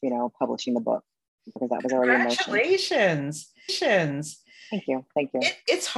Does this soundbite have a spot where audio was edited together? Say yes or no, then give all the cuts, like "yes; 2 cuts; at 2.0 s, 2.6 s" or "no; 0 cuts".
yes; 2 cuts; at 1.6 s, 3.7 s